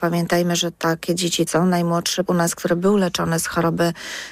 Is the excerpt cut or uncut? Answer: cut